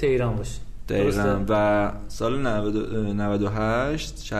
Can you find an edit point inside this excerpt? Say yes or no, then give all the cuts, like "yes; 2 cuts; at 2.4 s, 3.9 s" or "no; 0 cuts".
no; 0 cuts